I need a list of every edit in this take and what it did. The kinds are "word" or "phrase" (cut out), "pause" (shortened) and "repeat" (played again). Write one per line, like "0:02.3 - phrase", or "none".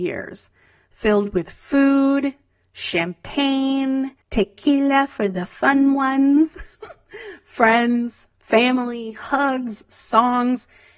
0:04.2 - pause
0:06.7 - pause